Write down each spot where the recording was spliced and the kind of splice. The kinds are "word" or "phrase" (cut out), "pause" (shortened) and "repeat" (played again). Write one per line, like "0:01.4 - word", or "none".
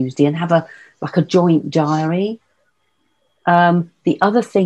none